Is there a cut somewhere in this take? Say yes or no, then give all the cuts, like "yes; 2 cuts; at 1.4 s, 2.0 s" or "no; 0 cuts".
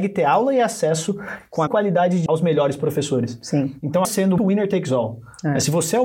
yes; 4 cuts; at 1.7 s, 2.3 s, 4.0 s, 4.4 s